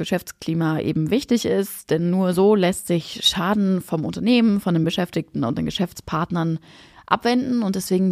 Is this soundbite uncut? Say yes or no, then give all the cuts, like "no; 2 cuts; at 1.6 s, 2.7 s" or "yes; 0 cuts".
yes; 0 cuts